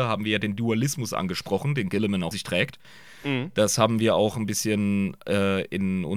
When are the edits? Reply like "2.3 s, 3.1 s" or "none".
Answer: 2.3 s